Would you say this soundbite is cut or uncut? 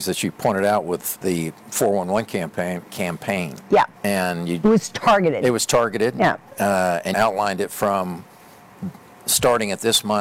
cut